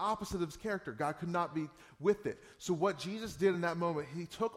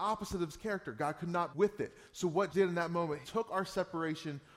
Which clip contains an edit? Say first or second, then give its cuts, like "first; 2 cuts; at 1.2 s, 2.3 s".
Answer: second; 3 cuts; at 1.5 s, 2.5 s, 3.2 s